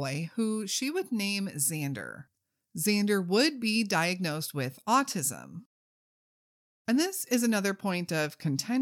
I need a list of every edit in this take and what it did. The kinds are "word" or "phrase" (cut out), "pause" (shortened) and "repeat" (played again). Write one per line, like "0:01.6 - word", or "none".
none

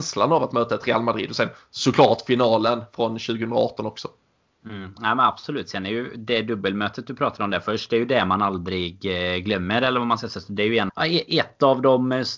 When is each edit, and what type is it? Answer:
0:10.9 - word

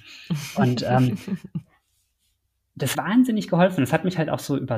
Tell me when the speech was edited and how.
0:02.9 - word

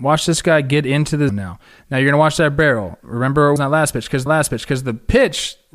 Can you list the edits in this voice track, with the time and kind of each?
0:01.3 - word
0:03.6 - word
0:04.3 - repeat

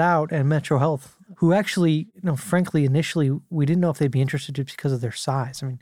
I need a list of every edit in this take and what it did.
none

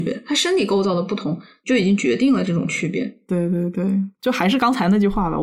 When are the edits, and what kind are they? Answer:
0:04.2 - word

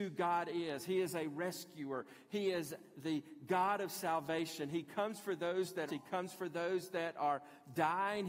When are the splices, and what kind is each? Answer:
0:05.9 - phrase

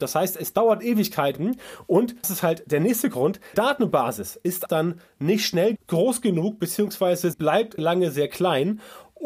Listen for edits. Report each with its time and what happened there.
0:02.2 - word
0:03.5 - word
0:04.7 - word
0:05.8 - word
0:07.3 - word
0:07.8 - word

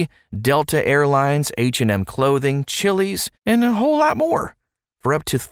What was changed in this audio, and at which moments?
0:03.3 - pause

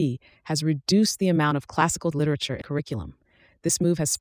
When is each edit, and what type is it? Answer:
0:02.1 - word
0:02.6 - word

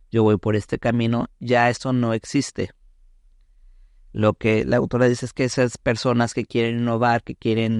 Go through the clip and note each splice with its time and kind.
none

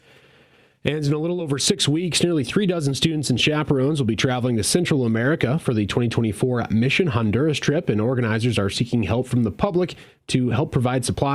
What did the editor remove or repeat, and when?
none

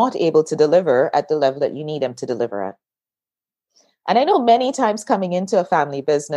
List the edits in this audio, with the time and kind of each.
none

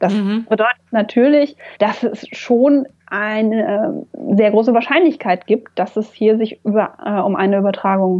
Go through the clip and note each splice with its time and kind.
0:01.7 - pause
0:02.9 - pause

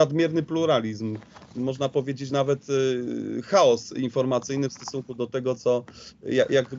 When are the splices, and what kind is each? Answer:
none

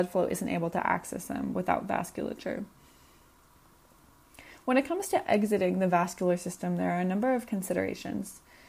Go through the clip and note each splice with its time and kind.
none

